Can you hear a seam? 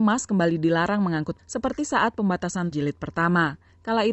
yes; 2 cuts; at 1.4 s, 2.7 s

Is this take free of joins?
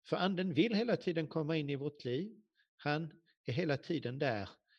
yes; 0 cuts

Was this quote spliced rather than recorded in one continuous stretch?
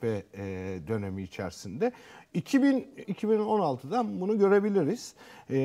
yes; 1 cut; at 3.0 s

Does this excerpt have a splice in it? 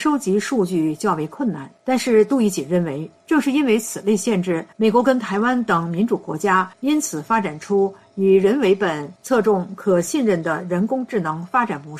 yes; 5 cuts; at 1.8 s, 3.2 s, 4.7 s, 6.7 s, 9.2 s

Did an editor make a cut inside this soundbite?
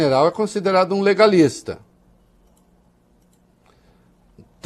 no; 0 cuts

